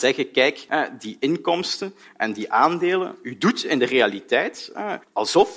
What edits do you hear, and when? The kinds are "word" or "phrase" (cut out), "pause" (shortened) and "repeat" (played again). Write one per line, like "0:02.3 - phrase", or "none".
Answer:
none